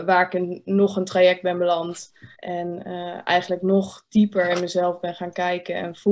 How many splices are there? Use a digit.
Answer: 1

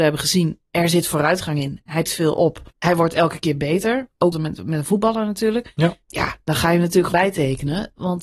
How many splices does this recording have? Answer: 5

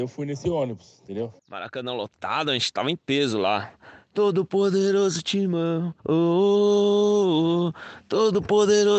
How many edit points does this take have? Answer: 2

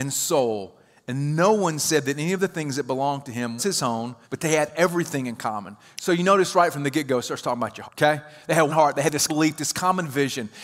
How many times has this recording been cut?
5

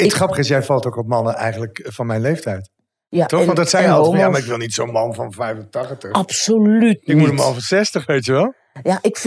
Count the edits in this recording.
0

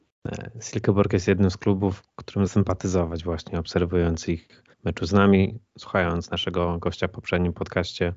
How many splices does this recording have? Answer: 2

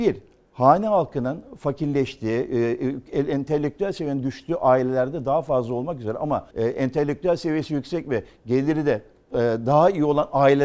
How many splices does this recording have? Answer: 1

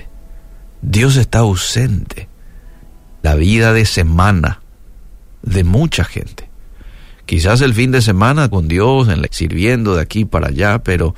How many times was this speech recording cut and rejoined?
3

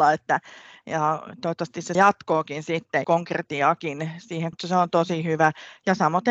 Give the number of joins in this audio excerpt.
3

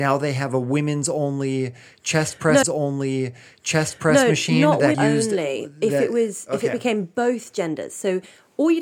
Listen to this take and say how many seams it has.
2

